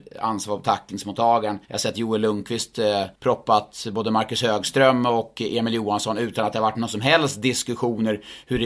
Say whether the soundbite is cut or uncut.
cut